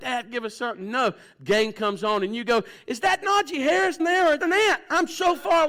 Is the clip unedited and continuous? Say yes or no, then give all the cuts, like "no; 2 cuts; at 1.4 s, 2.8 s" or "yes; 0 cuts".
no; 2 cuts; at 4.0 s, 4.4 s